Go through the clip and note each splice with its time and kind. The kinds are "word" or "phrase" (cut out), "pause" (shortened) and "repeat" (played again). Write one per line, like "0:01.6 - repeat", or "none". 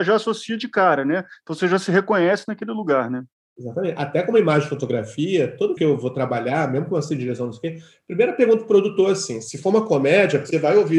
0:05.8 - word